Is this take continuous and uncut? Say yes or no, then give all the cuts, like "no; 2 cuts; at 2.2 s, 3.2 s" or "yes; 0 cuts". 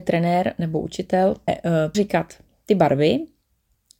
no; 2 cuts; at 1.5 s, 1.9 s